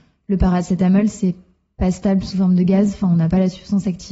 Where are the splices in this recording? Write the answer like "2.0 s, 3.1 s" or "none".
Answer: none